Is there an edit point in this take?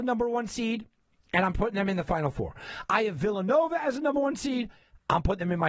no; 0 cuts

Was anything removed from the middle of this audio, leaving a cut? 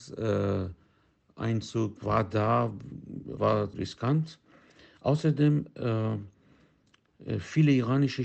yes; 3 cuts; at 2.0 s, 3.4 s, 3.7 s

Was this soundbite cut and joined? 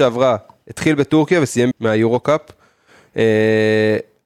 yes; 1 cut; at 1.7 s

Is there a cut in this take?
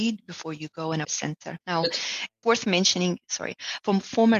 yes; 3 cuts; at 1.0 s, 1.6 s, 2.4 s

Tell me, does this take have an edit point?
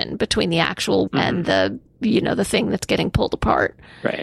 yes; 2 cuts; at 1.1 s, 1.9 s

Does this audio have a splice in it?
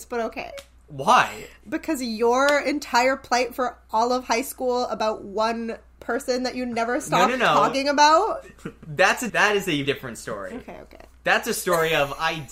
yes; 2 cuts; at 9.3 s, 9.8 s

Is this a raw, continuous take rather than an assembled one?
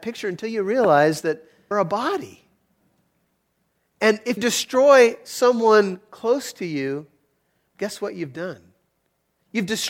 no; 2 cuts; at 1.7 s, 4.4 s

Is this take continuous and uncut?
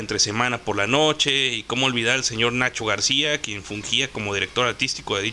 yes; 0 cuts

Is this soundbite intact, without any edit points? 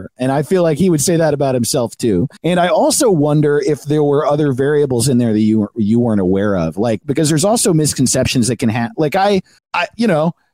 no; 2 cuts; at 2.4 s, 9.6 s

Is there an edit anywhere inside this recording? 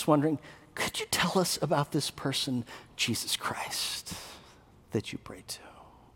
no; 0 cuts

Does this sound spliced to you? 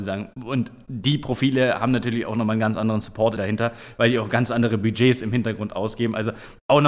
yes; 1 cut; at 3.4 s

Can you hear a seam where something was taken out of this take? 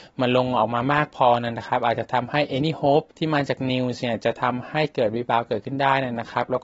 yes; 1 cut; at 3.1 s

